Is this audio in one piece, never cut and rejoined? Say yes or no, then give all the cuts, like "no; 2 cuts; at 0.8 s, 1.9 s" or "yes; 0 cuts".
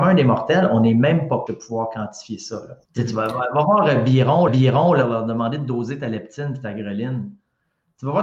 no; 3 cuts; at 1.5 s, 2.8 s, 4.5 s